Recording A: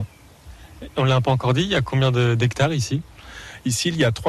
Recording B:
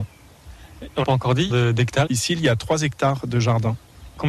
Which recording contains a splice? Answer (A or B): B